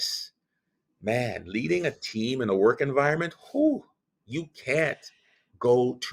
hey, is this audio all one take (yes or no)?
yes